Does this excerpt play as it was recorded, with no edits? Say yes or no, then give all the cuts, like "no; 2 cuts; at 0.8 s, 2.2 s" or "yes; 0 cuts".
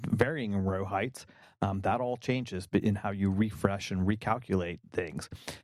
yes; 0 cuts